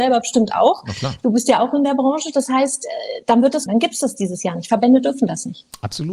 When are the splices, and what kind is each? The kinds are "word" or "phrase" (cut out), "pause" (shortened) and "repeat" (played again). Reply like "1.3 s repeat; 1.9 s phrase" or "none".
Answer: 3.7 s word